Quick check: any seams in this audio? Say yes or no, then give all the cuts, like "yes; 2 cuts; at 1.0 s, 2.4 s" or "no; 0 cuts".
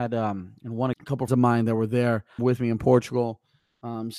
yes; 3 cuts; at 0.9 s, 1.3 s, 2.4 s